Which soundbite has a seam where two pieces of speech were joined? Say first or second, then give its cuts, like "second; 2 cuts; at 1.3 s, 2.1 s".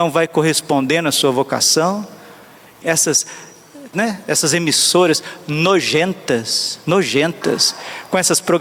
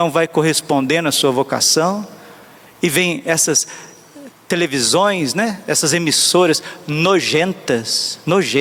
first; 2 cuts; at 2.8 s, 3.9 s